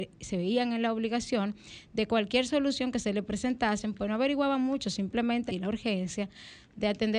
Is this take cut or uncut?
cut